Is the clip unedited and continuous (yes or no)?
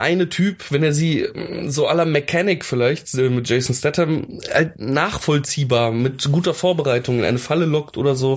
yes